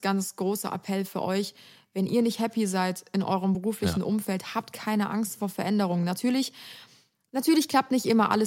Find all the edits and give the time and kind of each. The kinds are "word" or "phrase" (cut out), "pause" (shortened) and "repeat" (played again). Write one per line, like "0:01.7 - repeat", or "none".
none